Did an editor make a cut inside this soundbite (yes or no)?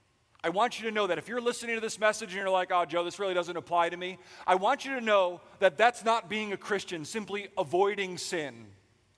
no